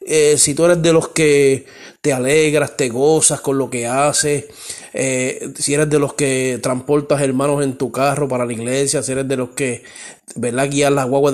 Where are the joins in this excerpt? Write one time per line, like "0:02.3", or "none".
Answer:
none